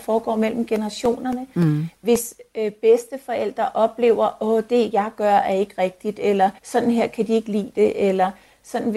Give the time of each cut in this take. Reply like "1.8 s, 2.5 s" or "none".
6.6 s